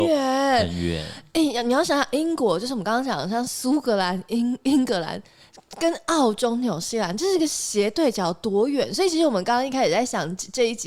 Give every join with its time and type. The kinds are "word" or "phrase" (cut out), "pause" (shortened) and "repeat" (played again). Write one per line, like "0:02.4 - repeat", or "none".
none